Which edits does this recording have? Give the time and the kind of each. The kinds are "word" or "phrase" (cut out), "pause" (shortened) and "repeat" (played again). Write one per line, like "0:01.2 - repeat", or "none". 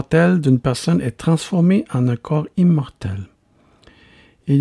none